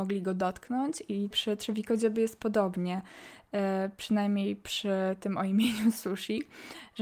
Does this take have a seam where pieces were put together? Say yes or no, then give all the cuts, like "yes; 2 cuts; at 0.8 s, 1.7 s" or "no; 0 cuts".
yes; 1 cut; at 1.3 s